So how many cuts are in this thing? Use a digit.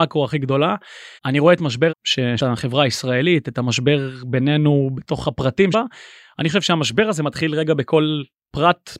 4